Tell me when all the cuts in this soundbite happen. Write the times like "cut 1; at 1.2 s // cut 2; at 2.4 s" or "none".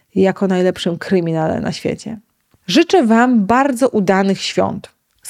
none